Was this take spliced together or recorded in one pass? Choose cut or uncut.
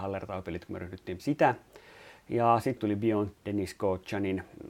cut